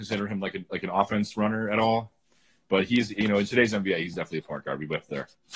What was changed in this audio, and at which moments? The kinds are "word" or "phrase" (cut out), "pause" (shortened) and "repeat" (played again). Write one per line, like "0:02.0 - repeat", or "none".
none